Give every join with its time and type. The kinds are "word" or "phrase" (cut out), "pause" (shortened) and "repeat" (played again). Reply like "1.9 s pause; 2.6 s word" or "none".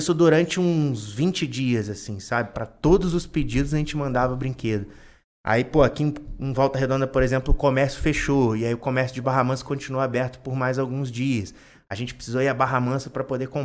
none